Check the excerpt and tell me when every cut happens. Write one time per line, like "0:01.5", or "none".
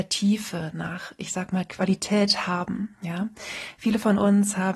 none